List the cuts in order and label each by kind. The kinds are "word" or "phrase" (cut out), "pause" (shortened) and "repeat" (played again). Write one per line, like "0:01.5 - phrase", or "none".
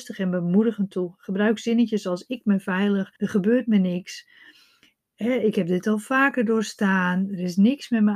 0:03.2 - pause